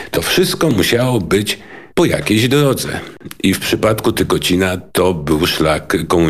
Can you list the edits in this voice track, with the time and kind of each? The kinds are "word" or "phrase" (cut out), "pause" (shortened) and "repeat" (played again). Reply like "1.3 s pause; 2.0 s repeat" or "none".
1.9 s pause; 4.9 s pause